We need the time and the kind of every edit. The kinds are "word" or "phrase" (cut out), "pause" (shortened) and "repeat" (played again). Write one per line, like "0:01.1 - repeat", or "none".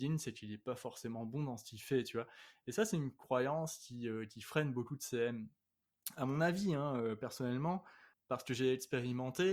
0:08.1 - word